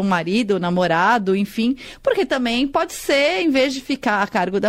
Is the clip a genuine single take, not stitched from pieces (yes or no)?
yes